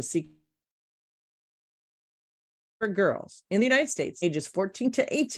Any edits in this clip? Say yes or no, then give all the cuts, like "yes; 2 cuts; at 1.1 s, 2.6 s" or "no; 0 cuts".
no; 0 cuts